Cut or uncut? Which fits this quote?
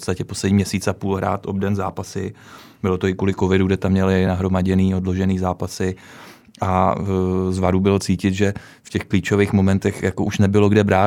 uncut